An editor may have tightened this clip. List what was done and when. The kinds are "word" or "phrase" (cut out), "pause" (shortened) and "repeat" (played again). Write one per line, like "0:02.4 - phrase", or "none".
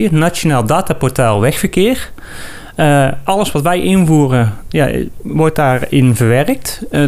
none